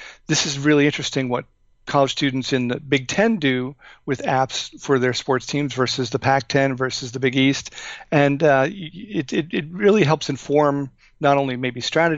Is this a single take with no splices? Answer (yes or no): yes